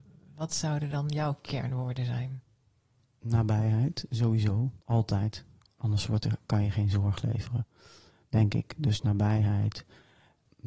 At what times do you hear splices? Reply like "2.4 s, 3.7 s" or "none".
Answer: 4.8 s